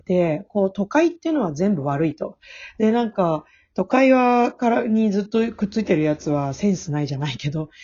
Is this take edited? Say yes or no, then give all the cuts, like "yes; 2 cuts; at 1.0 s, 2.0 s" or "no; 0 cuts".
no; 0 cuts